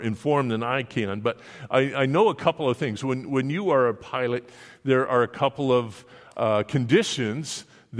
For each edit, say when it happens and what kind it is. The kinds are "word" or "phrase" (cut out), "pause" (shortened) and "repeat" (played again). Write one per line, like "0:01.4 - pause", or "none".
none